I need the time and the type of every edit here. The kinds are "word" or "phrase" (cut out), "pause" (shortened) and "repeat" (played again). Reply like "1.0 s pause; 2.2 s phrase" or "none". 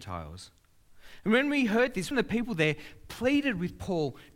2.1 s word

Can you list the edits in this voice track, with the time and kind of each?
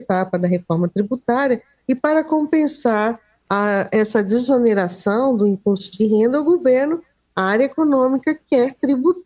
none

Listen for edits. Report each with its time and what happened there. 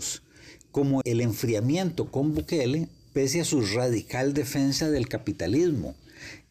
1.0 s word

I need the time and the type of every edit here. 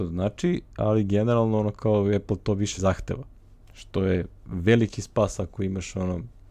2.8 s word

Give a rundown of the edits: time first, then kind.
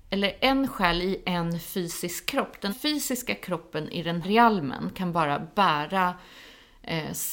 2.7 s word; 4.2 s word

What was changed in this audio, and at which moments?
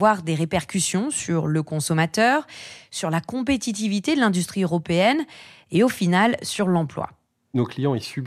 none

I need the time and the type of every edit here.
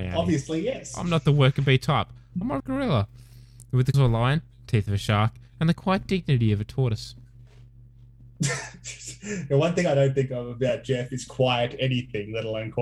2.6 s phrase; 3.9 s word

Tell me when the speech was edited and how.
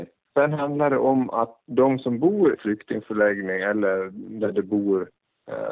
1.6 s pause; 2.6 s phrase

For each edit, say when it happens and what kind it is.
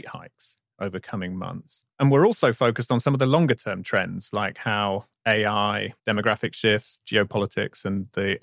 1.9 s pause; 6.0 s pause

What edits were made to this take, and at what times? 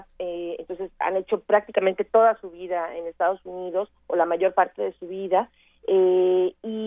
none

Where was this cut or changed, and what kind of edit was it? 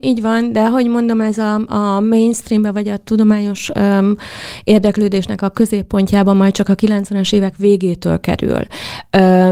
none

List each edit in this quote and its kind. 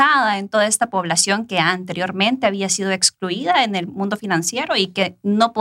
none

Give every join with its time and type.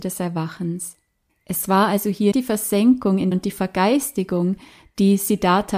1.3 s pause; 2.3 s word; 3.3 s phrase

